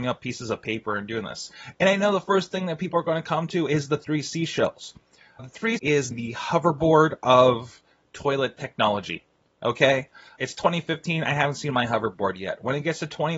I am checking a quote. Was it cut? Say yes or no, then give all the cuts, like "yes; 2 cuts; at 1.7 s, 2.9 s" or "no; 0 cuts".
yes; 4 cuts; at 5.4 s, 5.8 s, 6.1 s, 10.4 s